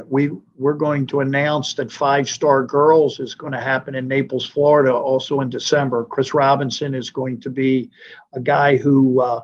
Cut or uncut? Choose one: uncut